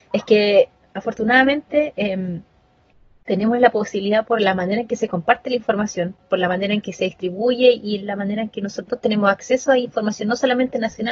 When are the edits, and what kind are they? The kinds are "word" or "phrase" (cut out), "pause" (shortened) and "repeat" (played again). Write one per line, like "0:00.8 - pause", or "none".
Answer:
none